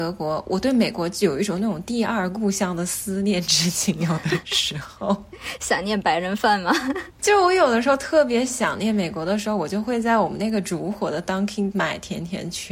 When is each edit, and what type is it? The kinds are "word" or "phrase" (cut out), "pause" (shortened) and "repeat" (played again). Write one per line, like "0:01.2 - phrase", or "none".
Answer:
0:11.7 - word